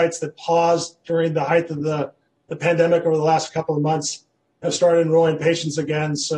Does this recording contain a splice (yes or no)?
no